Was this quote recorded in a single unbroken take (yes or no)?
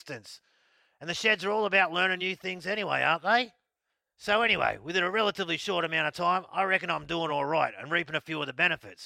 yes